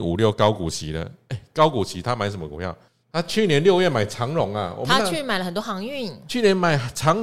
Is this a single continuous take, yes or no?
no